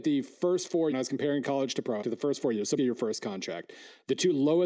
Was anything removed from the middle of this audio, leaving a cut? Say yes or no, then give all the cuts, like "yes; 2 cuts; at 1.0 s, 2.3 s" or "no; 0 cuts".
yes; 3 cuts; at 0.9 s, 2.0 s, 2.8 s